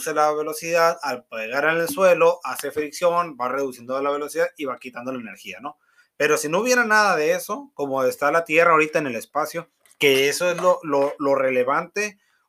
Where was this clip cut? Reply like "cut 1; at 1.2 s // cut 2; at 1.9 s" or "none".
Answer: none